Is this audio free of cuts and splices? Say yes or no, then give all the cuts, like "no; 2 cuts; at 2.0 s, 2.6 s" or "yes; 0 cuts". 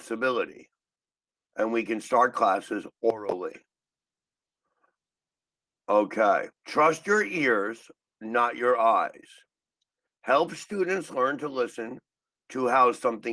no; 1 cut; at 6.5 s